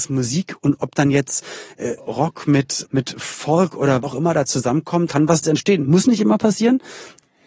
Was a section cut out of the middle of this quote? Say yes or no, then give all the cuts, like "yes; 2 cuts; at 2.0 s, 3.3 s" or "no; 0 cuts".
yes; 5 cuts; at 2.0 s, 2.8 s, 4.0 s, 5.1 s, 5.4 s